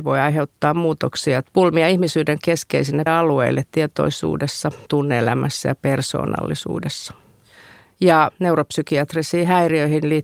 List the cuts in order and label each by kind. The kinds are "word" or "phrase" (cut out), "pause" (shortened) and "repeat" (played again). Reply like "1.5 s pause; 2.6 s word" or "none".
1.4 s word; 2.4 s word; 3.1 s word; 4.9 s word; 8.3 s word